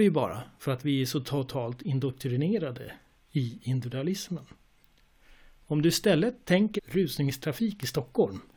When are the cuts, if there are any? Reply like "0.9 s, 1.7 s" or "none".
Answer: 6.8 s